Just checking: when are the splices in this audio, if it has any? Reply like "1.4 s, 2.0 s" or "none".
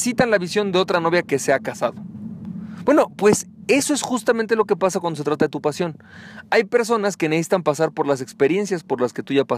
none